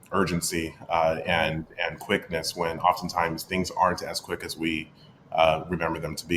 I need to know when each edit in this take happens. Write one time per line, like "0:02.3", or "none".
none